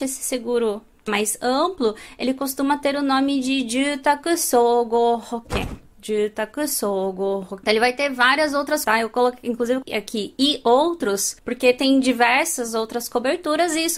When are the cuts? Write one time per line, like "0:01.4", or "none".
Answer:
0:01.1
0:07.6
0:08.8
0:09.8